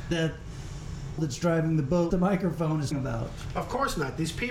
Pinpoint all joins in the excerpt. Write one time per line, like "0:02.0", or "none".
0:01.2
0:02.1
0:02.9